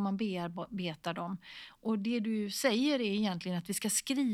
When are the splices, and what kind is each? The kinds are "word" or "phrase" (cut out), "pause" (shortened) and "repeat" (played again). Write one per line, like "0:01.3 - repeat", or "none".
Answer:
none